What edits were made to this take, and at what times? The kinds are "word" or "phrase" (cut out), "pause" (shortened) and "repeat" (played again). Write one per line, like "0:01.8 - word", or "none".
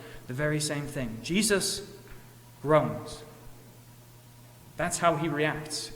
none

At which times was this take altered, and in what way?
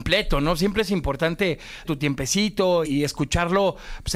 0:01.8 - word
0:02.8 - word

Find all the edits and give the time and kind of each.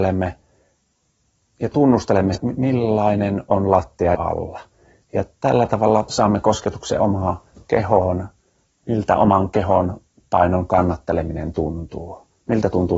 0:02.3 - word
0:04.1 - word

